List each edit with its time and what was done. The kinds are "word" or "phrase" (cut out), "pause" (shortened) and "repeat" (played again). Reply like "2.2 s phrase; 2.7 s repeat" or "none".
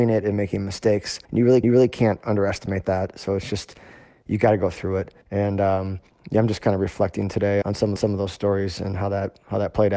1.2 s pause; 1.6 s repeat; 5.2 s pause; 6.1 s pause; 7.6 s word; 8.0 s repeat